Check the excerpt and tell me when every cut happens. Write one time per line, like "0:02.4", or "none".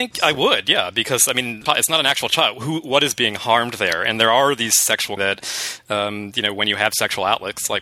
0:05.2